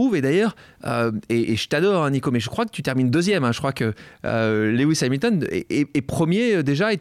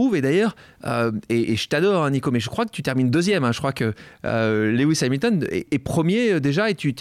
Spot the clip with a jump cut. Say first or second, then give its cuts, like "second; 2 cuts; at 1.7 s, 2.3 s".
second; 1 cut; at 5.7 s